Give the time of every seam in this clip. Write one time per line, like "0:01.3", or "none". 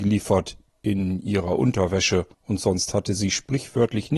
0:02.3